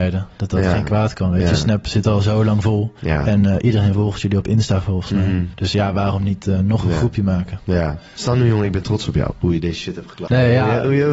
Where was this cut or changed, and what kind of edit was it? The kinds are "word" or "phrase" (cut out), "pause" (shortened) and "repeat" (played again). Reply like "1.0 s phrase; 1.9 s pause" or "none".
none

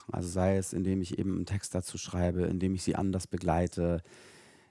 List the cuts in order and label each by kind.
none

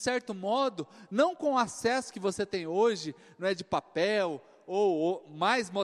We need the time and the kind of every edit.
none

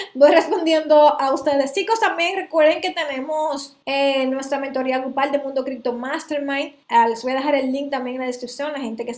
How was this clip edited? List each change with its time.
3.8 s pause; 6.8 s pause

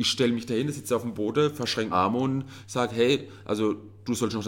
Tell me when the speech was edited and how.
1.9 s word

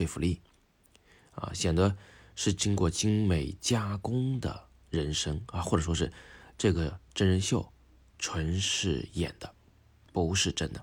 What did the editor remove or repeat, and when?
none

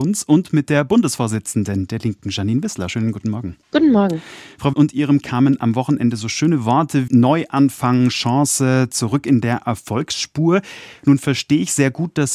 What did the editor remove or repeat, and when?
3.6 s pause; 4.7 s phrase; 5.2 s word; 7.1 s word

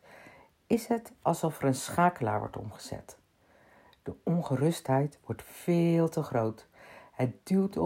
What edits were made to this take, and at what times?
none

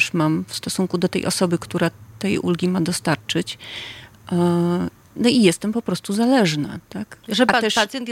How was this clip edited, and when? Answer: none

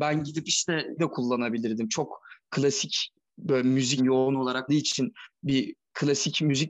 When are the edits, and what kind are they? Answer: 1.0 s word; 3.3 s word; 4.0 s word; 4.7 s word

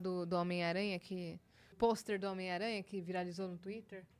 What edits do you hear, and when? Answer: 1.7 s phrase

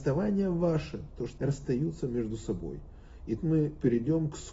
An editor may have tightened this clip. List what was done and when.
1.4 s word; 3.4 s word

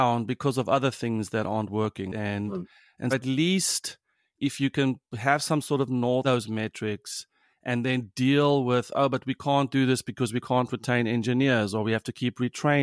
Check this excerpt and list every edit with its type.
3.1 s word; 6.2 s phrase

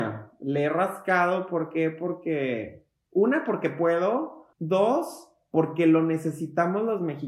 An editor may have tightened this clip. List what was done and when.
4.5 s pause

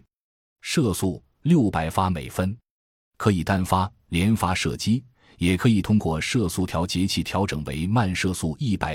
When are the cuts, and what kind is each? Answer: none

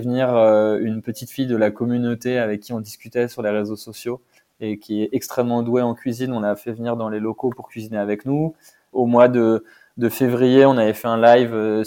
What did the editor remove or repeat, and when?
none

